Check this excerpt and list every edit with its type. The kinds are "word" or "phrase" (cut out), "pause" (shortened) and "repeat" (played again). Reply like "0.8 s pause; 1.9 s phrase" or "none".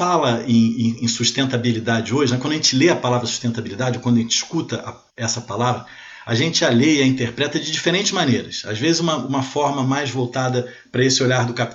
none